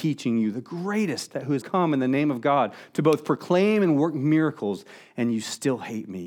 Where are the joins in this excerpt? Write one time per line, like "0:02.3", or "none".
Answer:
0:01.6